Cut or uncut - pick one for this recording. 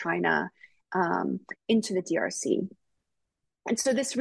uncut